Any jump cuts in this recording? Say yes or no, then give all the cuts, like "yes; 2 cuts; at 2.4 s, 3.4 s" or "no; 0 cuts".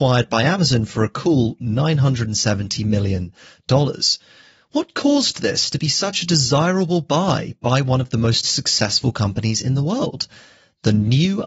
no; 0 cuts